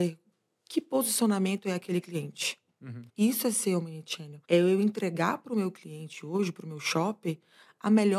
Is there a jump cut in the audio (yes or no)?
yes